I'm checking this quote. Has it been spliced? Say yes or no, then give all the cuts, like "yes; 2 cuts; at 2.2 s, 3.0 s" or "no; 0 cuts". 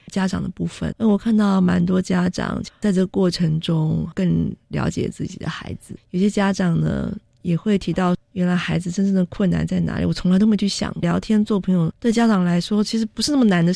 yes; 1 cut; at 0.9 s